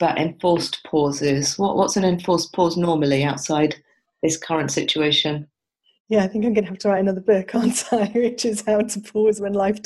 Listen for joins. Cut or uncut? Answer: uncut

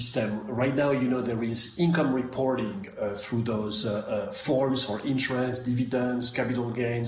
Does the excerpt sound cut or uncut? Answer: uncut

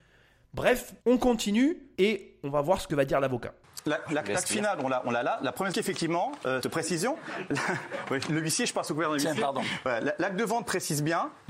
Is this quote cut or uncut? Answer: cut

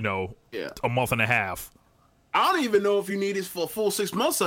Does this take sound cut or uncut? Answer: uncut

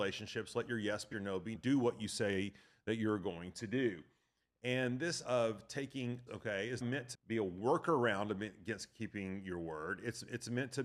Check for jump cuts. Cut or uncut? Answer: cut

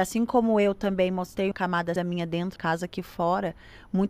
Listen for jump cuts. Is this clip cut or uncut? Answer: cut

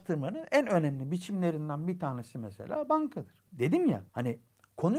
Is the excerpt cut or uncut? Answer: cut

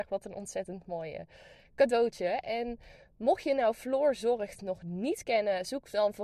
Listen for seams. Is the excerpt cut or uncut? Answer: uncut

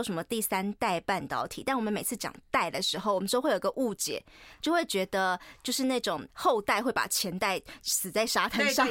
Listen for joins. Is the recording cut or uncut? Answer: cut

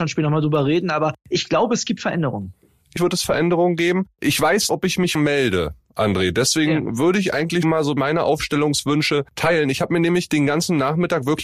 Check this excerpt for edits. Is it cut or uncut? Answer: cut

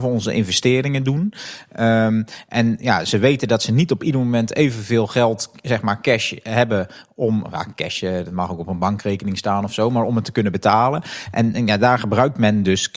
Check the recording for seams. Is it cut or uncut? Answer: uncut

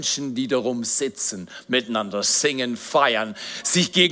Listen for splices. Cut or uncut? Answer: uncut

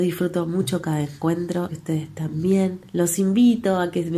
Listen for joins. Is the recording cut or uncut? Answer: cut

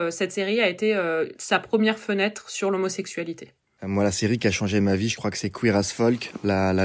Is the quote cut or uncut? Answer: uncut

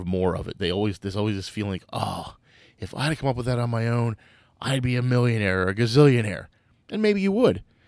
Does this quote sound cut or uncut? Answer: uncut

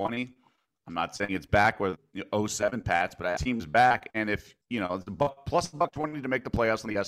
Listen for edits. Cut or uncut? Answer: cut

